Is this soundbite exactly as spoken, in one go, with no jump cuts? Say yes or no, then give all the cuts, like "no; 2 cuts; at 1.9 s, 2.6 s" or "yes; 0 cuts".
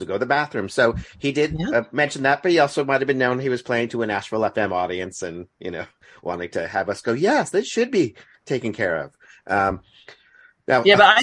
yes; 0 cuts